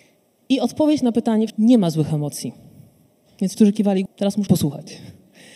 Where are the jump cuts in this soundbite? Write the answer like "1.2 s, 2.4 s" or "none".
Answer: 1.5 s, 3.5 s, 4.1 s, 4.5 s